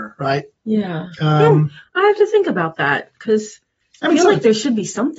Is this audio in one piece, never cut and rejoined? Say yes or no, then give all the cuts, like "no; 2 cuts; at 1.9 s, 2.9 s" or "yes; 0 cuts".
yes; 0 cuts